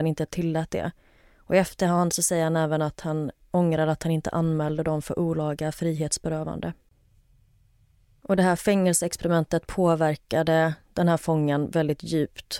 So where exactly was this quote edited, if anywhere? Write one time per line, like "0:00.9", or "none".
none